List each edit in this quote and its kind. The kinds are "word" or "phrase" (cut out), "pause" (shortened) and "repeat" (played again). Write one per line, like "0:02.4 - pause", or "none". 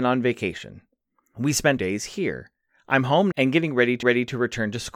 0:01.8 - phrase
0:03.3 - word
0:04.0 - repeat